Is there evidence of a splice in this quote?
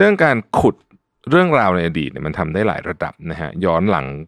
no; 0 cuts

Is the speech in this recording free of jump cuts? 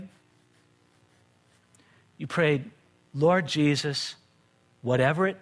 yes; 0 cuts

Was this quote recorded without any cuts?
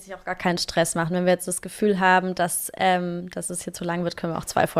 yes; 0 cuts

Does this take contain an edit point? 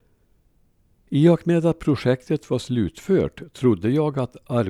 no; 0 cuts

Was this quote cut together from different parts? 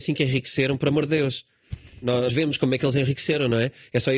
yes; 1 cut; at 2.3 s

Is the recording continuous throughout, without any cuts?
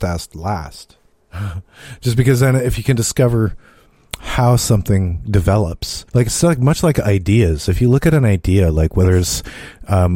no; 2 cuts; at 1.1 s, 6.1 s

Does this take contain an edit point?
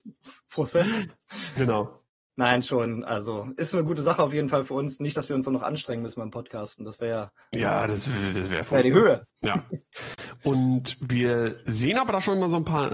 yes; 1 cut; at 9.4 s

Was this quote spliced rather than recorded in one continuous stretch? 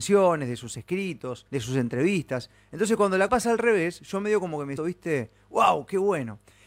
yes; 3 cuts; at 1.5 s, 3.3 s, 4.8 s

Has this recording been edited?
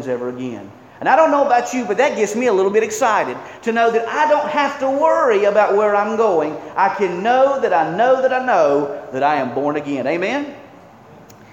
no; 0 cuts

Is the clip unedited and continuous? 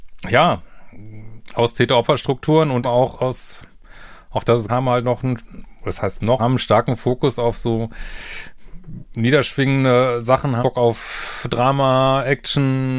no; 5 cuts; at 2.8 s, 3.1 s, 4.7 s, 6.4 s, 10.6 s

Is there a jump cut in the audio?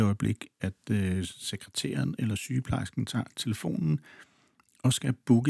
no; 0 cuts

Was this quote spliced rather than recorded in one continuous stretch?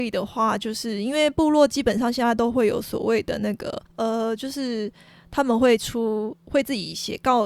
yes; 1 cut; at 3.9 s

